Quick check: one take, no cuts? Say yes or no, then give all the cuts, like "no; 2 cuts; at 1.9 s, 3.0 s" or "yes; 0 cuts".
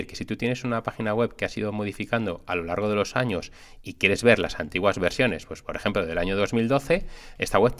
yes; 0 cuts